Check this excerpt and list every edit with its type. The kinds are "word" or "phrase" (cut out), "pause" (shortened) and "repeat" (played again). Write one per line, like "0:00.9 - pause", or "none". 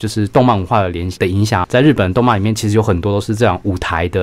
0:01.6 - word